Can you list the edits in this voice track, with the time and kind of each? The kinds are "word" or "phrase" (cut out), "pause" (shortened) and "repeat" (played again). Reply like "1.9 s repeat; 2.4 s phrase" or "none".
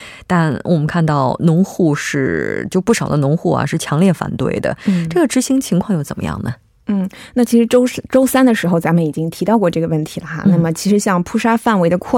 none